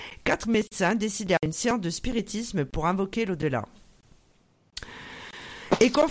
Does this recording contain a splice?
yes; 1 cut; at 1.4 s

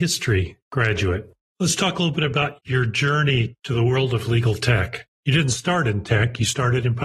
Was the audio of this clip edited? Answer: no; 0 cuts

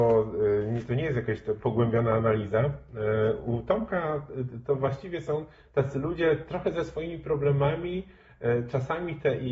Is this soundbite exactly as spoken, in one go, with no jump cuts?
yes; 0 cuts

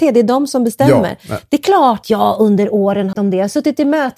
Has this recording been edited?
yes; 2 cuts; at 2.0 s, 3.1 s

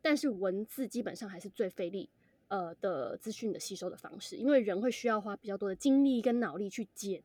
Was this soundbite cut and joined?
no; 0 cuts

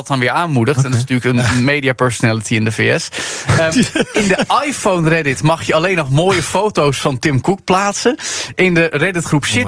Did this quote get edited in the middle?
no; 0 cuts

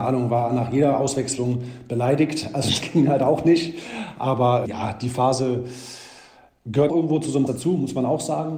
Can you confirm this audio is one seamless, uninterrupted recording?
no; 4 cuts; at 2.8 s, 4.6 s, 6.9 s, 7.5 s

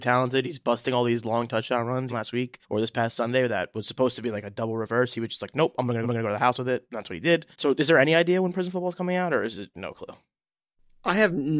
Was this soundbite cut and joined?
yes; 5 cuts; at 2.1 s, 2.6 s, 6.0 s, 7.5 s, 9.7 s

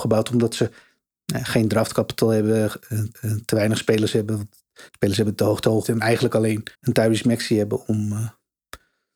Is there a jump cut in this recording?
yes; 4 cuts; at 3.1 s, 4.9 s, 5.8 s, 6.7 s

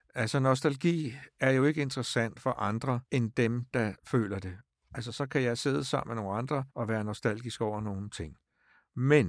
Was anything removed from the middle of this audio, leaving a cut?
yes; 3 cuts; at 3.0 s, 4.0 s, 6.7 s

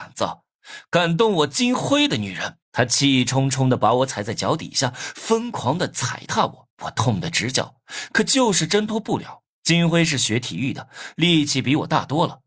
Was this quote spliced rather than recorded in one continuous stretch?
yes; 3 cuts; at 2.6 s, 6.7 s, 9.5 s

